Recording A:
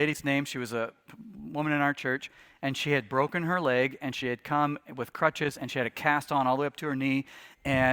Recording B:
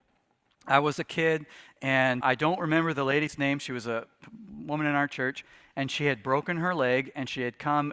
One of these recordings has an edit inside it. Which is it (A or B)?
B